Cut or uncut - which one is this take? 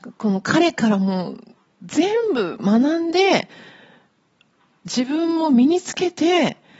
uncut